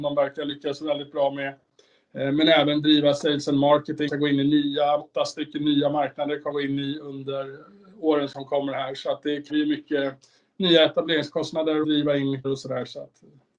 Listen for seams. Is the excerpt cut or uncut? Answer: cut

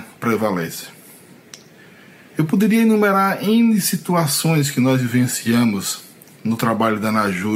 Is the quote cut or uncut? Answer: uncut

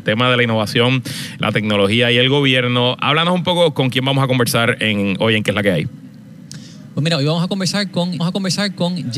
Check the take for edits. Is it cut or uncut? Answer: cut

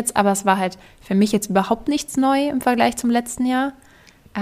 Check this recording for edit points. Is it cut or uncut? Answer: uncut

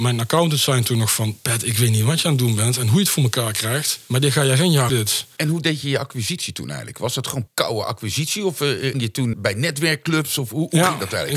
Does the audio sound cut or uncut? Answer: cut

